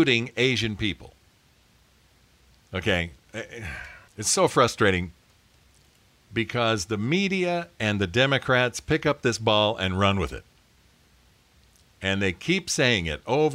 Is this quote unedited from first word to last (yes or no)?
yes